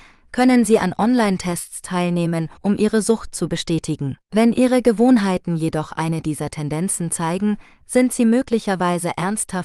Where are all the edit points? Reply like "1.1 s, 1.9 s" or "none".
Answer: 2.6 s, 4.2 s